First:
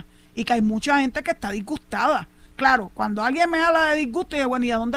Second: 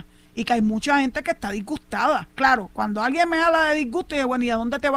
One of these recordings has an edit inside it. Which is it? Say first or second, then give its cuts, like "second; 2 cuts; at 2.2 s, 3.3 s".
second; 1 cut; at 2.3 s